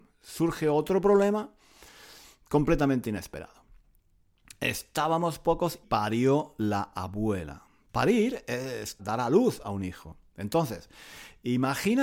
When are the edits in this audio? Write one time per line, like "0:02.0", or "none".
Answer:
0:05.8
0:09.0